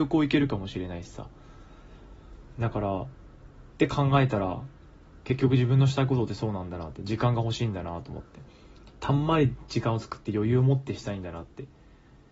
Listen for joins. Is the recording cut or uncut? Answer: uncut